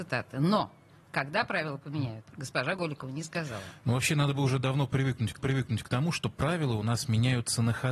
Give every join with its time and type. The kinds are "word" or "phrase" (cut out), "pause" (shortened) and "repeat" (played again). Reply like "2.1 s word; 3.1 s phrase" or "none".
5.4 s repeat